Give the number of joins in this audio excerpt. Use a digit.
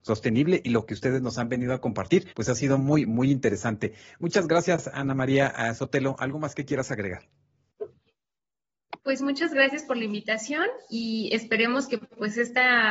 2